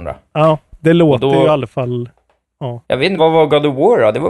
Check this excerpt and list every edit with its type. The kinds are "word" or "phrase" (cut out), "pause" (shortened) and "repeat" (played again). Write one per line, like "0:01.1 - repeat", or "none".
0:02.8 - pause
0:03.2 - word